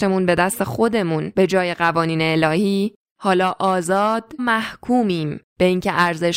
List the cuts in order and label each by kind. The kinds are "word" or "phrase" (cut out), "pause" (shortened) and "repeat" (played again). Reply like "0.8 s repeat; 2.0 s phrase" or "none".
4.4 s word